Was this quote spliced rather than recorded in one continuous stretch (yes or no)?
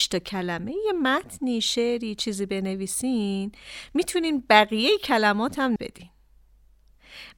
yes